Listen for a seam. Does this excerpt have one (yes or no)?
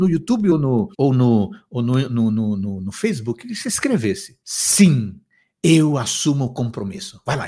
yes